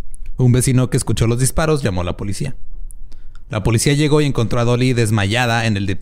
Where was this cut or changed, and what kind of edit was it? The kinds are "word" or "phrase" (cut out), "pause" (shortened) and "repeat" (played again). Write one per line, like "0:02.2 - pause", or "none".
none